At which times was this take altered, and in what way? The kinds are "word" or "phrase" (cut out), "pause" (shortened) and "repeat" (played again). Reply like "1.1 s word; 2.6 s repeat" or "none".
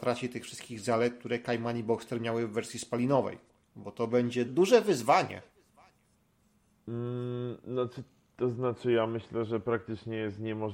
3.5 s pause; 4.5 s word